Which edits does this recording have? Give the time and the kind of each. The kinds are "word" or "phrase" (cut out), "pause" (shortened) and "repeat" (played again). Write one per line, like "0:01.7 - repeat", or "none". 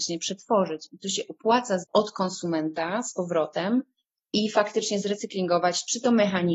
0:01.8 - word

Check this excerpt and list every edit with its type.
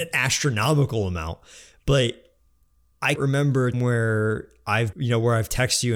0:03.2 - word
0:03.7 - word
0:04.9 - word

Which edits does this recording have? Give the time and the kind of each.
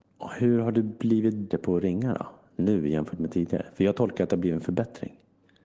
0:01.5 - word

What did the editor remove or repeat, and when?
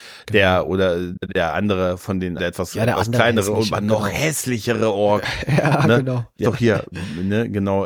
0:01.2 - word
0:02.4 - word
0:06.4 - word

